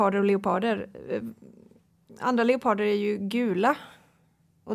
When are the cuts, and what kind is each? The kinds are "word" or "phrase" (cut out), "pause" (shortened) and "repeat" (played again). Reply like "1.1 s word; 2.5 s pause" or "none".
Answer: none